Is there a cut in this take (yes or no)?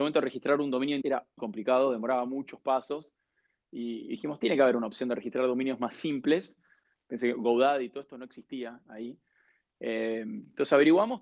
yes